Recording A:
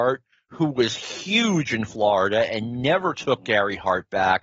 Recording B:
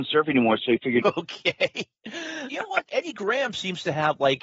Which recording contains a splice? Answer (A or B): B